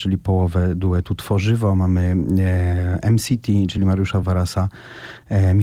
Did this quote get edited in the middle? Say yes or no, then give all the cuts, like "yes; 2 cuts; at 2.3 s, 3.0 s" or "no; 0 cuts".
no; 0 cuts